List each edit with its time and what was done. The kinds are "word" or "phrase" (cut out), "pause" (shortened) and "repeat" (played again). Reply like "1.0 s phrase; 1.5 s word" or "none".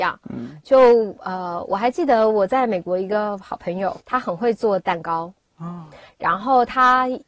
4.0 s pause